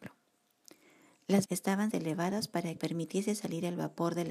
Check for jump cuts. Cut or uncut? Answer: cut